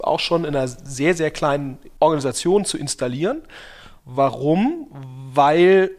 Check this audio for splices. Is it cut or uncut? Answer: cut